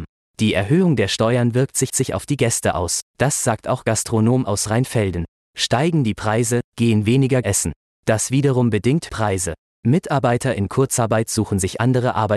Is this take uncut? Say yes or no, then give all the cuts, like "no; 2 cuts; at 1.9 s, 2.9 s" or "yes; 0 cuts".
no; 5 cuts; at 1.9 s, 3.1 s, 4.4 s, 7.4 s, 9.1 s